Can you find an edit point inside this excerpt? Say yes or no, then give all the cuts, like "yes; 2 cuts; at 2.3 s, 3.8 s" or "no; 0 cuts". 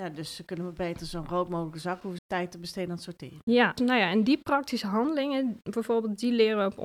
yes; 2 cuts; at 2.2 s, 3.8 s